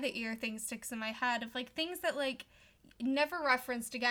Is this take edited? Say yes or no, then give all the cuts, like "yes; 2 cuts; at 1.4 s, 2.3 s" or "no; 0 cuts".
no; 0 cuts